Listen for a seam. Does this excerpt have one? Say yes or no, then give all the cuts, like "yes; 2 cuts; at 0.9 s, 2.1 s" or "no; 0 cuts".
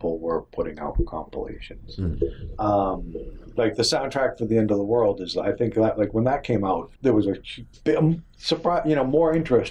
yes; 1 cut; at 7.0 s